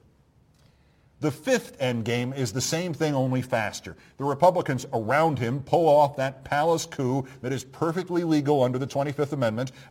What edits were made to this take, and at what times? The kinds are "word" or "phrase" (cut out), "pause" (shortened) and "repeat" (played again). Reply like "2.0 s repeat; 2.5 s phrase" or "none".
none